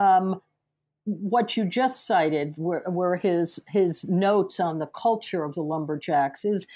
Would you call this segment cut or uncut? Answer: uncut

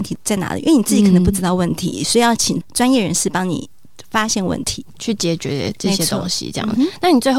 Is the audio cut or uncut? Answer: cut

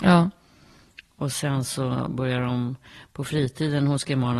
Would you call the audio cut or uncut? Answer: uncut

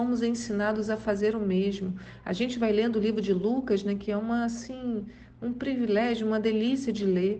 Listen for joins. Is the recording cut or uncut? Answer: uncut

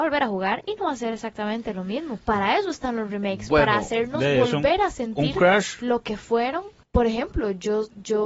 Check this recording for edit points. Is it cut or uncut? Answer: cut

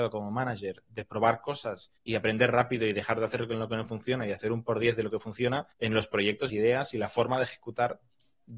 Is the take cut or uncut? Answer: cut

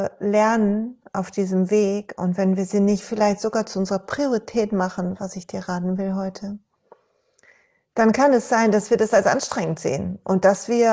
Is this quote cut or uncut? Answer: uncut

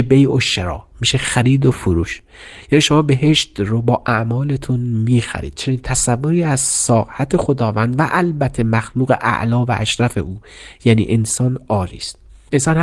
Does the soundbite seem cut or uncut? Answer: uncut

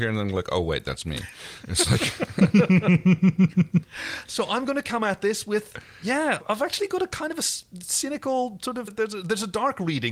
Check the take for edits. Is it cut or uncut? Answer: uncut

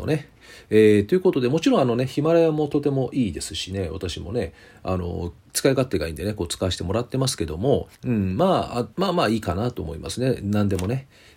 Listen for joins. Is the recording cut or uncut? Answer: cut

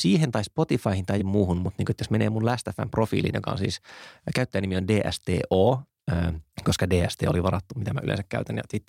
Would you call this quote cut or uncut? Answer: cut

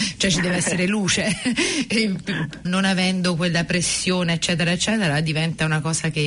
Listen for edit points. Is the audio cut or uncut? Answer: cut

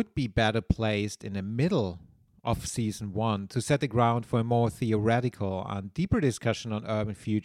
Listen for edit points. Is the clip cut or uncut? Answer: uncut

